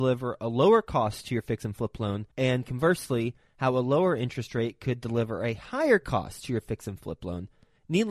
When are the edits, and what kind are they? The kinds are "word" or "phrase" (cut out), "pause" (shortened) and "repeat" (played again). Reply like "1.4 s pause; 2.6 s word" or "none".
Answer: 2.3 s pause